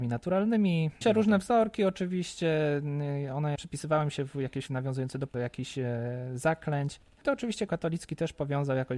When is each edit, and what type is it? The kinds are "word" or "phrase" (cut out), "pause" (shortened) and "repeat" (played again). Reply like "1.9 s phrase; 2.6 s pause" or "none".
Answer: 1.0 s word; 3.6 s word; 4.7 s word; 5.3 s word; 7.7 s word